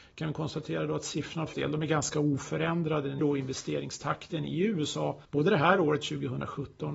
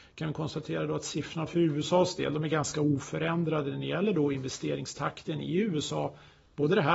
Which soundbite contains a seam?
first; 3 cuts; at 1.5 s, 3.2 s, 5.2 s

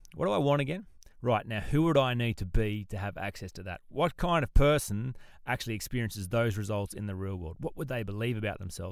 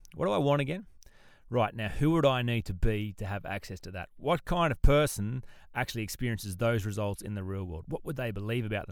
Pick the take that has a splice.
first; 1 cut; at 1.1 s

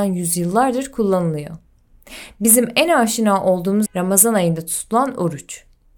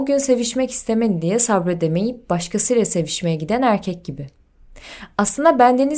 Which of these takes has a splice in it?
first; 1 cut; at 3.9 s

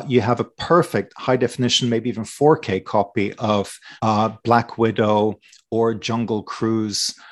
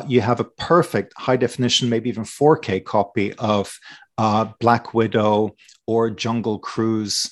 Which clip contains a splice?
first; 1 cut; at 4.0 s

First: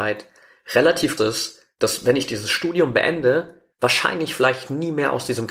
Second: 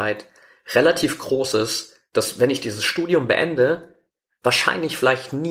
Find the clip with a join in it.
first; 2 cuts; at 1.2 s, 3.7 s

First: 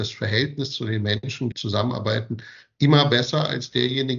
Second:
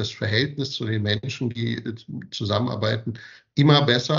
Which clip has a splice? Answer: first; 1 cut; at 1.5 s

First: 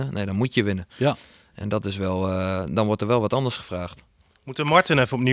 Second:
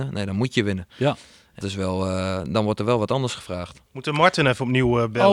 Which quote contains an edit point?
second; 2 cuts; at 1.6 s, 3.9 s

